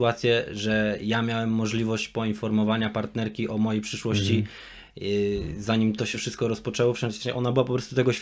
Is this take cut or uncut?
uncut